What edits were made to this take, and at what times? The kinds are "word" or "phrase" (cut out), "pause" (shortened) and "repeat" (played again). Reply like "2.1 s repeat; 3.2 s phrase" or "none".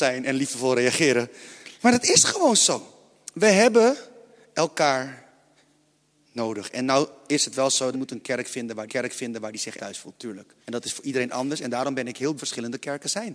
1.7 s pause; 7.9 s phrase; 8.9 s repeat; 9.8 s word; 10.6 s pause; 12.4 s phrase

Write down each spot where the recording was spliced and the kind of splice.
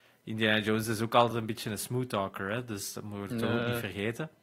none

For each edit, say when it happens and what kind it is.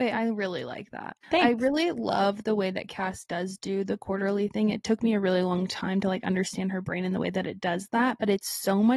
1.2 s pause

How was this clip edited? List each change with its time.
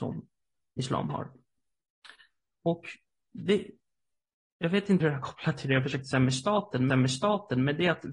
5.0 s word; 6.9 s repeat

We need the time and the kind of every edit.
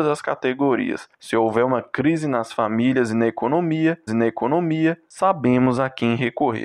4.1 s repeat

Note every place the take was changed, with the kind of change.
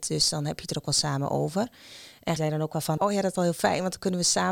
2.4 s word; 3.0 s word; 3.4 s word

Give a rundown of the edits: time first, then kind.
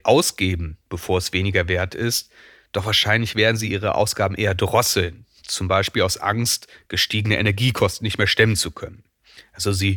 none

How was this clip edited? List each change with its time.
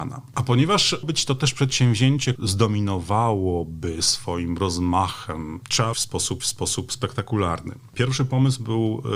1.0 s word; 2.3 s phrase; 5.9 s phrase; 6.4 s repeat

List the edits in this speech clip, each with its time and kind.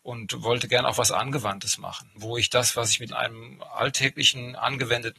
3.1 s word

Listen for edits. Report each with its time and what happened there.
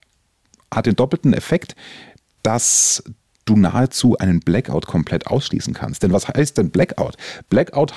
none

